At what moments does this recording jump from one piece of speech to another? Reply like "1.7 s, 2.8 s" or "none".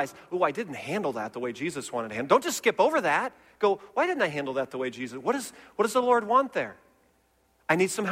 none

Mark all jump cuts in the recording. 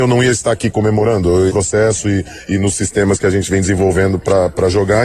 1.5 s

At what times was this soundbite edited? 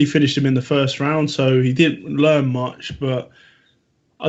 none

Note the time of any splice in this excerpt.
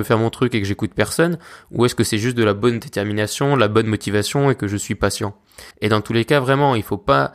5.7 s

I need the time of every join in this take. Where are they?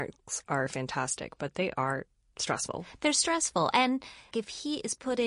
4.3 s

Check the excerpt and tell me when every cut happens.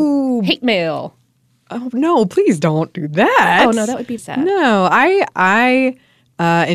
4.2 s

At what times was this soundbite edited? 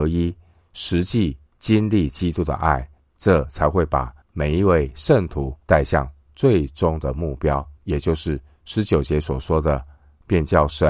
1.5 s, 3.0 s, 4.2 s, 5.6 s, 7.8 s

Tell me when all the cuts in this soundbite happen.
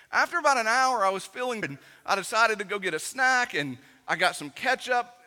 1.6 s

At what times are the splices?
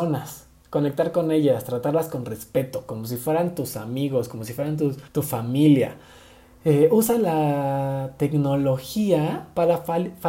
5.1 s

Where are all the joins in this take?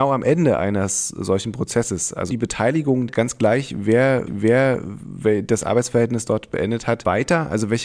2.3 s, 3.1 s, 4.3 s

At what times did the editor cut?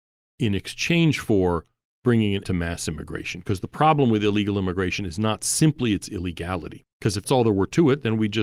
1.8 s, 2.4 s, 6.9 s, 7.2 s

